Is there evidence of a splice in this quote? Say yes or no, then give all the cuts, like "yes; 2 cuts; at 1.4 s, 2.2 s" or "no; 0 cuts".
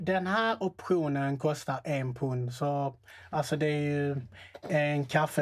no; 0 cuts